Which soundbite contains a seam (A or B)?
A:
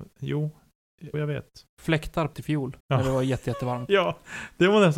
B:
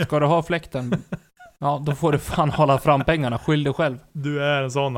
A